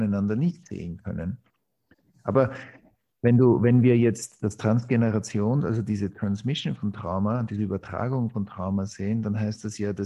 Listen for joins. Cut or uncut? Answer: uncut